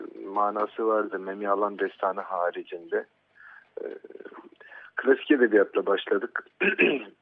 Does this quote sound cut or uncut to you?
uncut